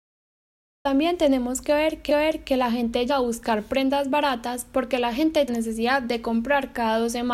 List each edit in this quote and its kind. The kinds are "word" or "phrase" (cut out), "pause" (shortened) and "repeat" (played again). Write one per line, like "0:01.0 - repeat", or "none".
0:02.1 - repeat
0:03.1 - word
0:05.5 - phrase